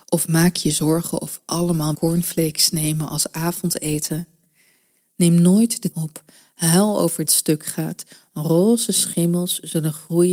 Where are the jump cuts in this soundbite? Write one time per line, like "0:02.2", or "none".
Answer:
0:01.4
0:01.9
0:05.9
0:07.2